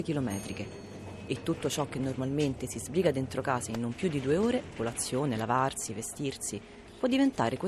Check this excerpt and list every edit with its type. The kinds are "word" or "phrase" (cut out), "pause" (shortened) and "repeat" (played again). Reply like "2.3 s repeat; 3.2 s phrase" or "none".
4.8 s word